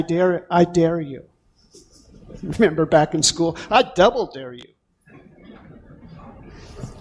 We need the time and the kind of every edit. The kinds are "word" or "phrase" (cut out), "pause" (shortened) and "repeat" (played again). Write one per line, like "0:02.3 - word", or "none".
none